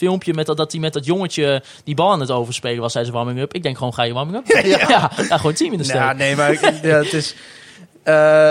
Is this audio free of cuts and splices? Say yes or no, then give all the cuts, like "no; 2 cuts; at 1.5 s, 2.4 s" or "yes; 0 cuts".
no; 1 cut; at 4.5 s